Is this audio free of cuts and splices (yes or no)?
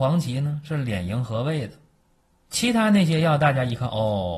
no